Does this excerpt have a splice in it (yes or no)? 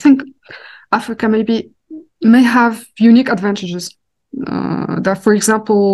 no